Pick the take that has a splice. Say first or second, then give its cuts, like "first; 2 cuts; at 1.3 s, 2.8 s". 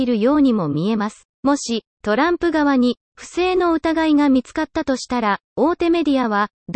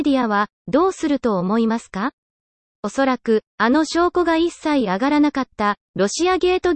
first; 1 cut; at 1.3 s